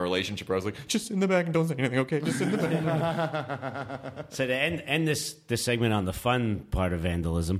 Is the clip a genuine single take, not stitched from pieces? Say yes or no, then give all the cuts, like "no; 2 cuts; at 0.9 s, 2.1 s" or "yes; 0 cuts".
yes; 0 cuts